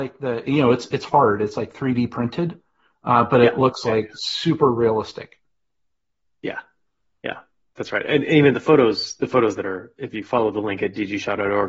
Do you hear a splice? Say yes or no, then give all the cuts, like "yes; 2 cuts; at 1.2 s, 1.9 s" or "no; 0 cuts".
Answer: no; 0 cuts